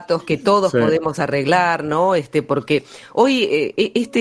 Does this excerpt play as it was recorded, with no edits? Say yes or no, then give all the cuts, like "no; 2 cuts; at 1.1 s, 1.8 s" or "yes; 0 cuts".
yes; 0 cuts